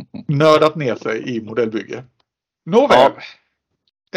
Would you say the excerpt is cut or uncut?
uncut